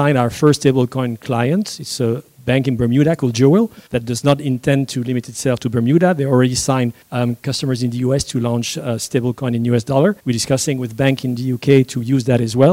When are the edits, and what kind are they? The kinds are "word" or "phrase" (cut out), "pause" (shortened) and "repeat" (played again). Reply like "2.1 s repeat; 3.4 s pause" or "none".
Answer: 3.9 s pause; 7.0 s pause; 10.2 s pause